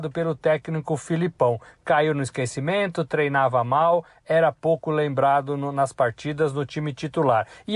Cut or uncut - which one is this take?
uncut